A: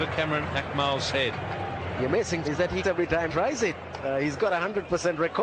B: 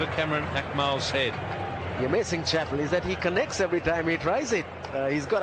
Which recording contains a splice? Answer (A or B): A